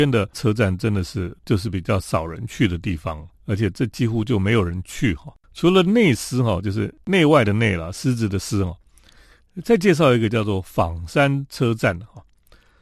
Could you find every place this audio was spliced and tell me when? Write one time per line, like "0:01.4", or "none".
0:01.4
0:03.3
0:05.4

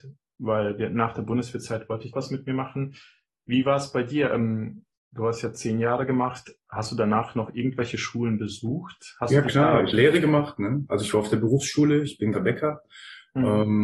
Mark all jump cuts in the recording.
0:02.1
0:09.9
0:12.3

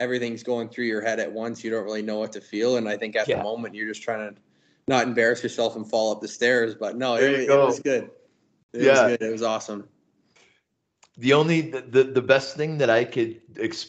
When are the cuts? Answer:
none

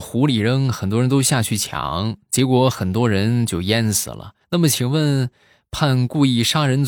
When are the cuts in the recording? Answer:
0:04.4

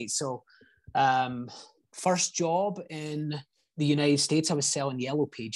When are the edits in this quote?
none

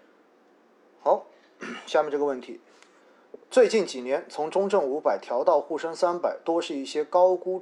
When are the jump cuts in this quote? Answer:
0:03.4

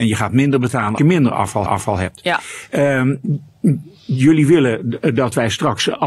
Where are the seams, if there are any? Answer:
0:01.0
0:01.7

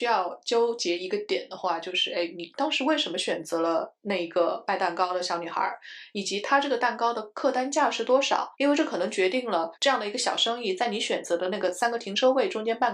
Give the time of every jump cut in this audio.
0:08.5
0:09.7

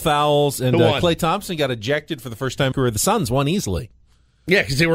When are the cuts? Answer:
0:02.7

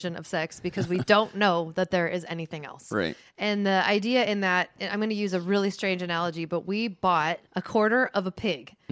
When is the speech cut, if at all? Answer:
0:07.5

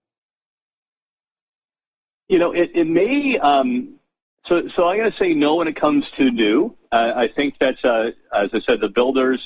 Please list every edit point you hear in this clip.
none

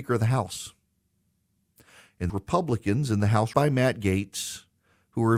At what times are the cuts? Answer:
0:02.3
0:03.5

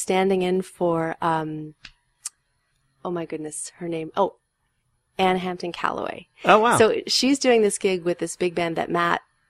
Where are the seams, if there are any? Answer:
none

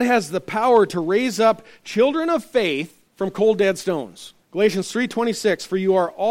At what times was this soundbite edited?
0:03.1
0:04.4

